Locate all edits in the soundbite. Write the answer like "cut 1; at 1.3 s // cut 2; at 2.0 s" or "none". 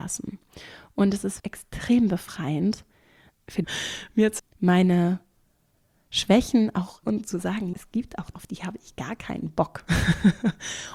cut 1; at 1.4 s // cut 2; at 3.6 s // cut 3; at 4.4 s // cut 4; at 7.0 s // cut 5; at 7.7 s // cut 6; at 8.3 s

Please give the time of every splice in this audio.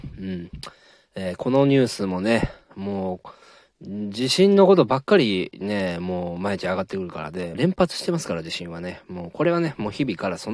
cut 1; at 7.5 s

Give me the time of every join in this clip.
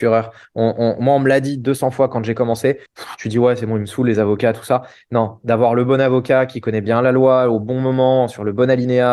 cut 1; at 2.9 s

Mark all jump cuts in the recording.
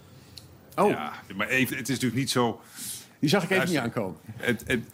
cut 1; at 1.7 s

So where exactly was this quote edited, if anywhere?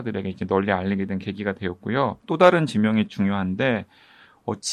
cut 1; at 2.2 s

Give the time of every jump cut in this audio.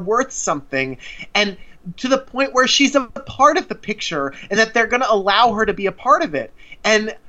none

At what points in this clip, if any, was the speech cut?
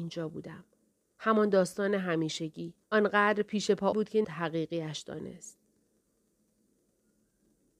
cut 1; at 2.8 s // cut 2; at 3.9 s // cut 3; at 4.2 s

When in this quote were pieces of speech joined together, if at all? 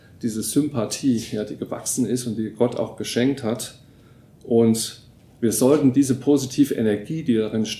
none

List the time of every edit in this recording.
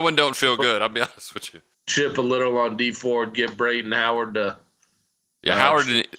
cut 1; at 1.7 s

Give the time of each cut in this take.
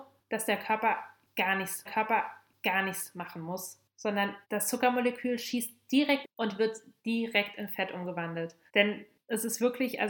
cut 1; at 1.9 s // cut 2; at 4.4 s // cut 3; at 6.2 s // cut 4; at 8.7 s

